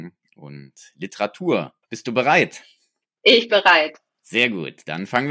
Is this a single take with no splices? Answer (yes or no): no